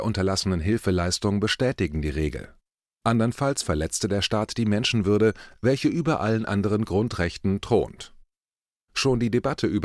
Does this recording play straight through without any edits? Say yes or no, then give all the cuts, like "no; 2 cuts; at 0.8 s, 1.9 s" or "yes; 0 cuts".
yes; 0 cuts